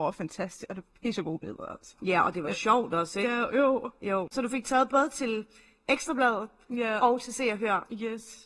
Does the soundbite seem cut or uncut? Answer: uncut